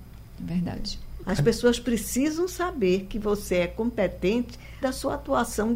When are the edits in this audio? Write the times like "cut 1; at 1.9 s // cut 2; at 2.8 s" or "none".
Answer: cut 1; at 4.8 s